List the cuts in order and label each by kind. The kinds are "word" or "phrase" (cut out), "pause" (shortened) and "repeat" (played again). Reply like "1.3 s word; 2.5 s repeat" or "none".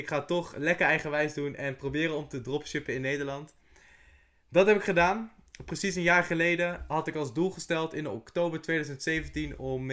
none